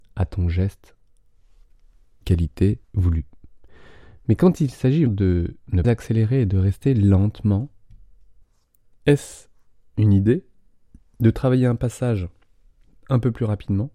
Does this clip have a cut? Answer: yes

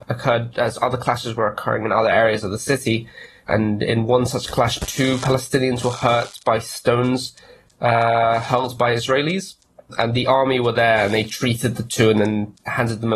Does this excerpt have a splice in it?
no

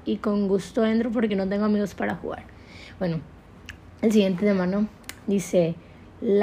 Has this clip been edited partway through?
no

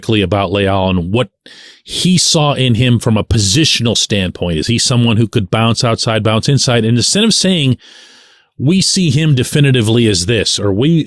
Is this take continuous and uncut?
yes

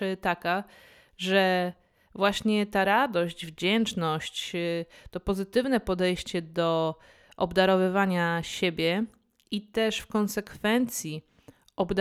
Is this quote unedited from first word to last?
yes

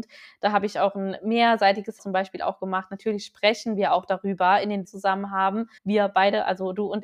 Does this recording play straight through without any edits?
no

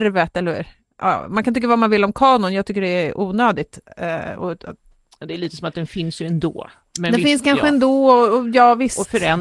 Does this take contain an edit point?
no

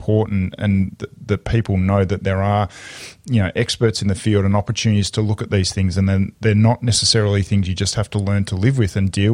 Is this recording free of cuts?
yes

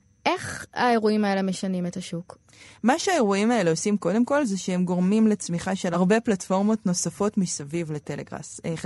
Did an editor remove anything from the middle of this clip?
no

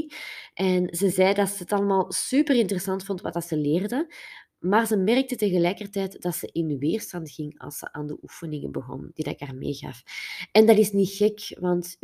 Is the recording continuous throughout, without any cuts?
yes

